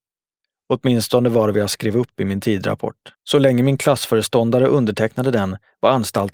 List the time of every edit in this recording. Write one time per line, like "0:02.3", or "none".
0:03.1